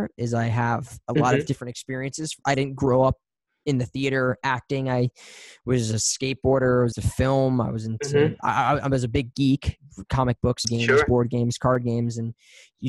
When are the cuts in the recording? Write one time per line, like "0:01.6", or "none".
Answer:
0:06.9
0:10.6